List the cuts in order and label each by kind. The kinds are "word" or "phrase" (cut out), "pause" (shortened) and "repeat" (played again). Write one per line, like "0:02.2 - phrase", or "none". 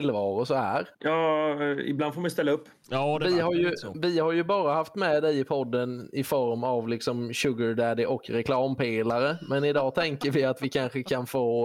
0:00.9 - pause

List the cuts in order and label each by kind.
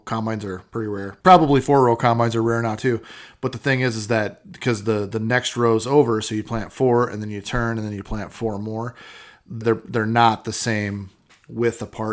0:01.2 - pause
0:09.6 - word

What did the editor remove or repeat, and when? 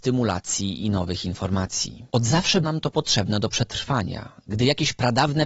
0:02.6 - word

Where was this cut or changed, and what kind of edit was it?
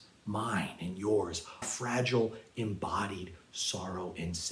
0:01.6 - word

